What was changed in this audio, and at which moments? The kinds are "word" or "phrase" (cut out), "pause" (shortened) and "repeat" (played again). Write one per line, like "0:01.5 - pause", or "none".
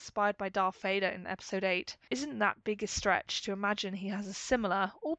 0:02.1 - phrase